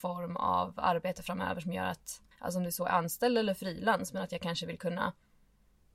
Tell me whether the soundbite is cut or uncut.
cut